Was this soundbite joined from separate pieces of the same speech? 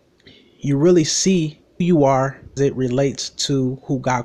yes; 2 cuts; at 1.8 s, 2.6 s

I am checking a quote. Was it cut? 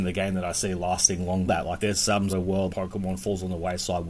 yes; 4 cuts; at 1.5 s, 1.8 s, 2.3 s, 2.7 s

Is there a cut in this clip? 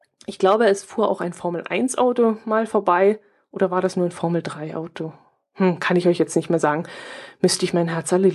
no; 0 cuts

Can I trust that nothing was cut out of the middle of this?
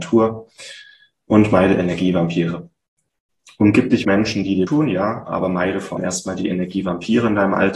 no; 3 cuts; at 4.0 s, 4.7 s, 6.0 s

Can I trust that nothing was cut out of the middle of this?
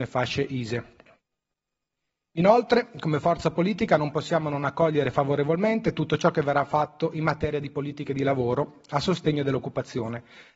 yes; 0 cuts

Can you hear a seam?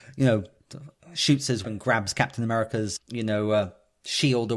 yes; 2 cuts; at 1.6 s, 3.0 s

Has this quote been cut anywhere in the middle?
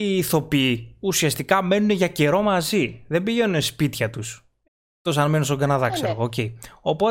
no; 0 cuts

